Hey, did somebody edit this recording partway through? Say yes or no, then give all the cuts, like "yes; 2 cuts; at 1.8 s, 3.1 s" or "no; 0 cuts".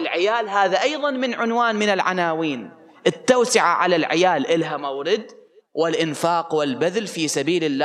no; 0 cuts